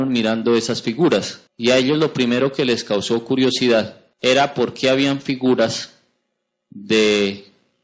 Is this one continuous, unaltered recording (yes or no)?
no